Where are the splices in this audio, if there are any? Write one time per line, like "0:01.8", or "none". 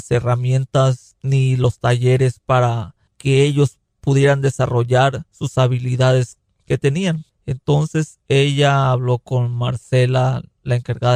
none